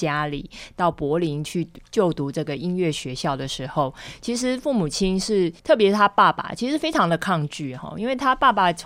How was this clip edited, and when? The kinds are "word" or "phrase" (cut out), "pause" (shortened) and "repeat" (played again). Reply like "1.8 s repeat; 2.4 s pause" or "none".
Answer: 5.6 s pause